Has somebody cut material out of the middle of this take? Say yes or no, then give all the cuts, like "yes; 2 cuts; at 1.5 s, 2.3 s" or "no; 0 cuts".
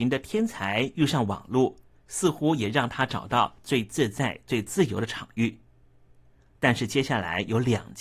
no; 0 cuts